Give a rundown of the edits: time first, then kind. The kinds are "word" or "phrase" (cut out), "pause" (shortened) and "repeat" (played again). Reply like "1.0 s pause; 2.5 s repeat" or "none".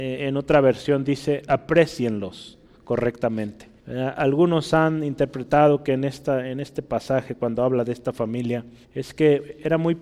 1.5 s word; 3.8 s pause; 8.8 s pause